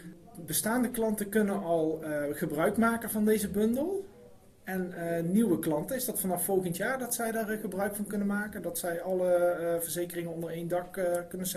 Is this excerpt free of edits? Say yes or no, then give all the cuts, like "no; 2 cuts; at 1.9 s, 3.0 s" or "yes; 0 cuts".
yes; 0 cuts